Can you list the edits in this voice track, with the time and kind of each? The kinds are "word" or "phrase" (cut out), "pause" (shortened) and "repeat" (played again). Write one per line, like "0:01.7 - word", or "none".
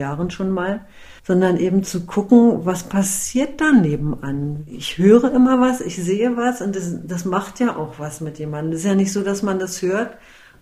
0:01.2 - pause